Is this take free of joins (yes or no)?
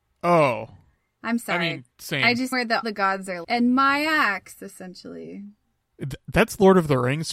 no